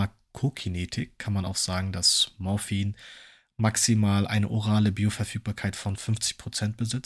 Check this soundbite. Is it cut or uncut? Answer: uncut